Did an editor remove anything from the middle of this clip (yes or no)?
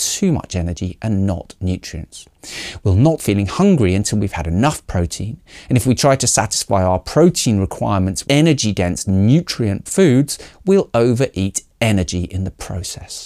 yes